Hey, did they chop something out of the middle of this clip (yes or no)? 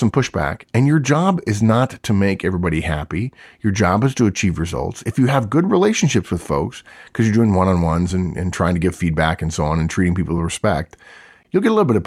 no